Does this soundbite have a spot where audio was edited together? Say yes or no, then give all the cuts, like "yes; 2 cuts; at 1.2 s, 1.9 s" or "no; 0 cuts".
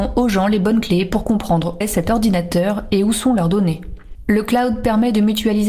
yes; 1 cut; at 1.8 s